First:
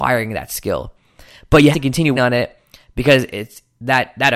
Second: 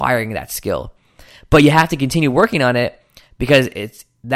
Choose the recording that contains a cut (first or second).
first